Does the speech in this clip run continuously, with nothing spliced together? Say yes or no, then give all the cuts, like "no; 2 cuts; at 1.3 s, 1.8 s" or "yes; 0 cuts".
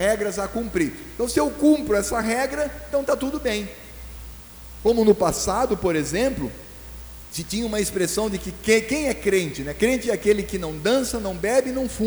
yes; 0 cuts